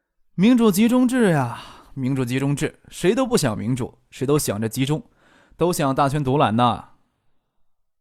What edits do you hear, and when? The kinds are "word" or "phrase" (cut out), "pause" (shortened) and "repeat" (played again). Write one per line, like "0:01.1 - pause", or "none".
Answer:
none